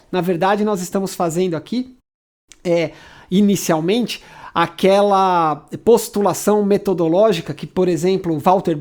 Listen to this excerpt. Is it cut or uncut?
uncut